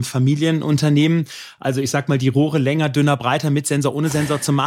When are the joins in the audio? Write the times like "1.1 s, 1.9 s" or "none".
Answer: none